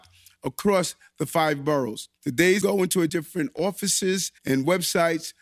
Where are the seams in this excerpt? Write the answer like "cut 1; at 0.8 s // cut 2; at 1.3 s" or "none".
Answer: cut 1; at 2.2 s // cut 2; at 2.6 s // cut 3; at 3.1 s // cut 4; at 4.4 s